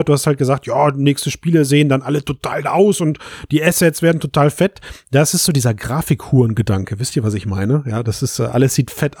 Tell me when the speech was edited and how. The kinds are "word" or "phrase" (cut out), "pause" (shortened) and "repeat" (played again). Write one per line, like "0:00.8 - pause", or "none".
0:02.6 - word
0:05.5 - phrase